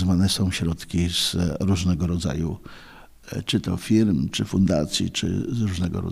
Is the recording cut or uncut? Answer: uncut